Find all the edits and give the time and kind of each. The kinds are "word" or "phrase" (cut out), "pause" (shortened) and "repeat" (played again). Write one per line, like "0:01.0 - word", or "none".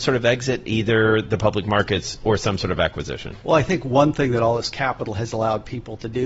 0:03.4 - pause